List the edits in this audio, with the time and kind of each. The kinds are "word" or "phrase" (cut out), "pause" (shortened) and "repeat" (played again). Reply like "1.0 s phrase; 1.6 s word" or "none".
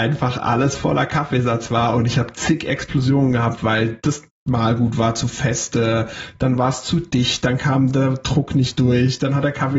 none